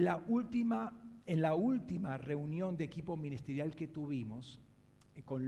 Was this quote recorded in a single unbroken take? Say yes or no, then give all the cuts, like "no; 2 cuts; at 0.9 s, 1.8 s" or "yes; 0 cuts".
yes; 0 cuts